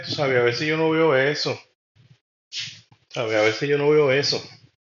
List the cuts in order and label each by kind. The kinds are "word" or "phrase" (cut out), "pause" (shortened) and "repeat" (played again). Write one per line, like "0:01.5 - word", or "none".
none